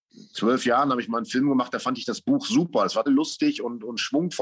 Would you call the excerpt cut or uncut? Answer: cut